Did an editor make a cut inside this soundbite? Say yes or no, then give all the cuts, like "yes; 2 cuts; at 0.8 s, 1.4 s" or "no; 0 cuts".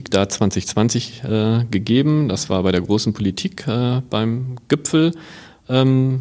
no; 0 cuts